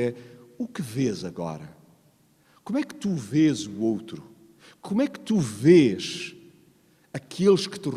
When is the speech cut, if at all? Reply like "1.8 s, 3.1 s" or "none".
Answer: none

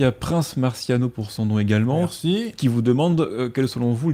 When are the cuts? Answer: none

